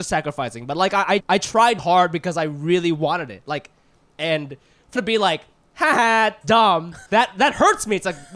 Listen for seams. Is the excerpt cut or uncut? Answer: cut